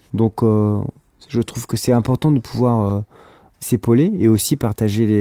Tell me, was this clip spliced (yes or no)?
no